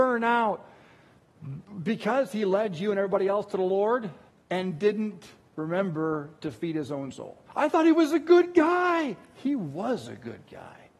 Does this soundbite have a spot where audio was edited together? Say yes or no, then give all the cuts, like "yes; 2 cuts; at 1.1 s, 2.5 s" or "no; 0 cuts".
yes; 2 cuts; at 4.3 s, 7.5 s